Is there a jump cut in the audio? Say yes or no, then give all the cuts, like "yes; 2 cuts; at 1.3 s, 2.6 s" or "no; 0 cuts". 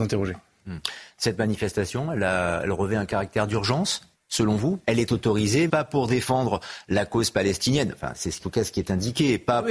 yes; 4 cuts; at 4.1 s, 4.8 s, 5.7 s, 8.4 s